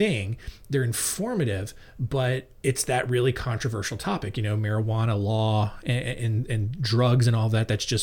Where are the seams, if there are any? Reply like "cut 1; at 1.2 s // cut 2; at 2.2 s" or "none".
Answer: cut 1; at 2.6 s